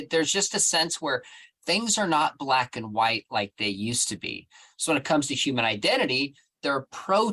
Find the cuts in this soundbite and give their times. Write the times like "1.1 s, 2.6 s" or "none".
none

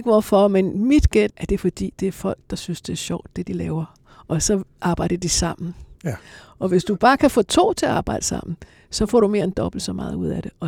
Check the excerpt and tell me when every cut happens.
1.3 s

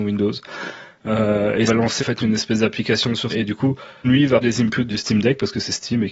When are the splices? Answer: 1.7 s, 2.0 s, 3.3 s, 4.0 s, 4.4 s, 4.9 s

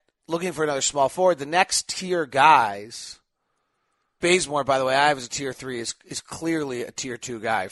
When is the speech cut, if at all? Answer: 4.2 s

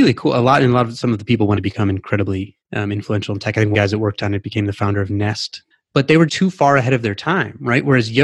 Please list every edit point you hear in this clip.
1.6 s, 2.6 s, 3.7 s, 5.7 s, 6.3 s

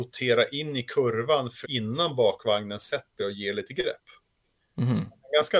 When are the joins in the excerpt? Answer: 1.6 s, 3.2 s

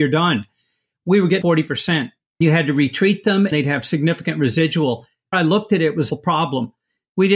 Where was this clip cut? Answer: 1.4 s, 2.4 s, 3.5 s, 5.3 s, 6.1 s

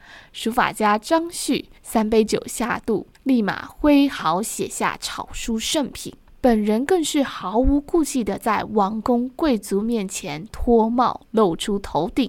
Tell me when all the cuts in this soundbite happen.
1.8 s, 3.1 s, 6.3 s

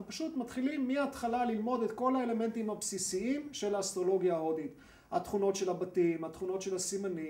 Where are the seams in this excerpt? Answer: none

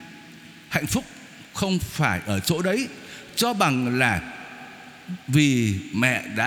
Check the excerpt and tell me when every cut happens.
1.5 s

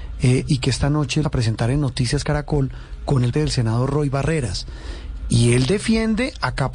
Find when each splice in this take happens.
1.2 s, 3.3 s

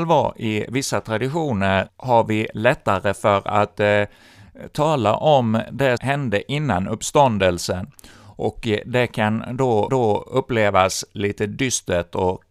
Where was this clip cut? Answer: 1.9 s, 6.0 s, 9.9 s

